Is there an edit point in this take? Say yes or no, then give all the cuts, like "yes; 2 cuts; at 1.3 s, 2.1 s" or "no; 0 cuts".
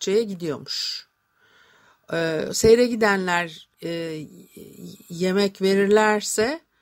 yes; 1 cut; at 3.7 s